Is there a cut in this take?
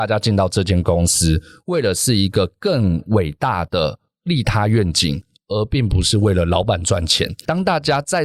no; 0 cuts

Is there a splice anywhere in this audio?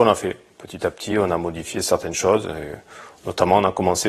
no; 0 cuts

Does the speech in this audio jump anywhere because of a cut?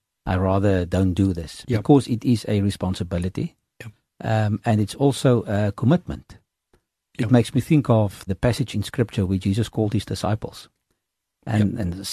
yes; 2 cuts; at 8.3 s, 8.7 s

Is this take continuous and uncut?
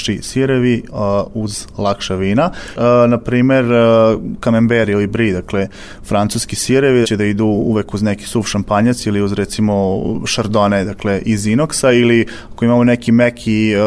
no; 1 cut; at 7.0 s

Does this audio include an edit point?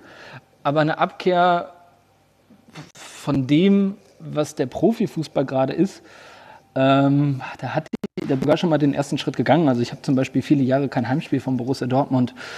no; 0 cuts

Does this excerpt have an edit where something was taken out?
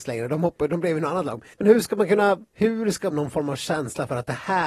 yes; 3 cuts; at 1.5 s, 2.5 s, 3.1 s

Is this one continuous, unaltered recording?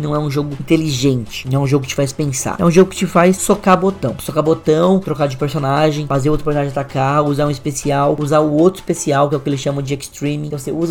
yes; 0 cuts

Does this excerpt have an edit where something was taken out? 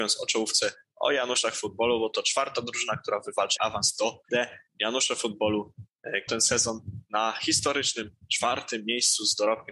yes; 3 cuts; at 3.6 s, 4.3 s, 6.3 s

